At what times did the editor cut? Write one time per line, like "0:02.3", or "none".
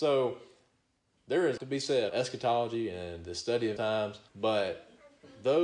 0:01.6
0:02.1
0:03.8
0:04.3